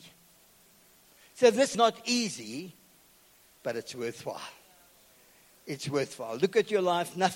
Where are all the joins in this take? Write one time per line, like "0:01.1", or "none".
0:01.7